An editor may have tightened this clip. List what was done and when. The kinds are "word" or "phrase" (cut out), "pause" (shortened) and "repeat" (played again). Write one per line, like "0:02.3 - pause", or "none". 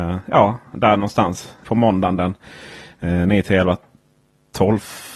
0:01.6 - word